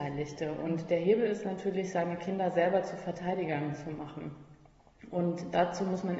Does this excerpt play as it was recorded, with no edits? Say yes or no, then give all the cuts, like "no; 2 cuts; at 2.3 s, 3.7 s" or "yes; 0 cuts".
yes; 0 cuts